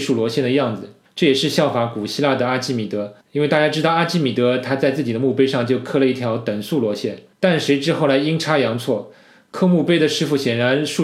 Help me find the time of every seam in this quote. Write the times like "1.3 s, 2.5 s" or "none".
1.1 s, 3.2 s, 7.3 s